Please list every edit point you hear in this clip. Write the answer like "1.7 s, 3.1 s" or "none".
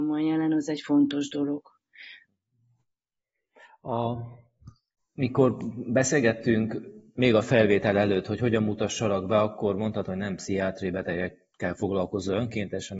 5.0 s, 11.5 s